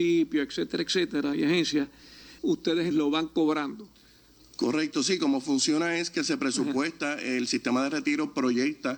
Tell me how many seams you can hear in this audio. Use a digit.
2